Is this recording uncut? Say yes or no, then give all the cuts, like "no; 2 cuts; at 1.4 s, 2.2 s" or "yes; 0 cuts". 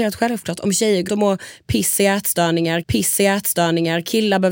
no; 2 cuts; at 1.1 s, 2.8 s